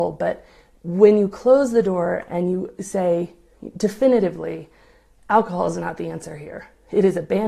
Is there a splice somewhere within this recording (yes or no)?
no